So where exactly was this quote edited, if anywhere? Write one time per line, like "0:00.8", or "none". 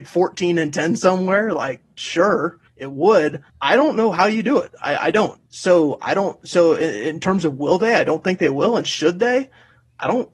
0:02.7
0:03.5
0:05.5